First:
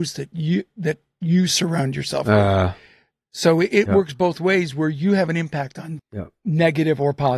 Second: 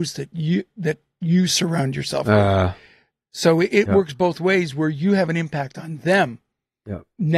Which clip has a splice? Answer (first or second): first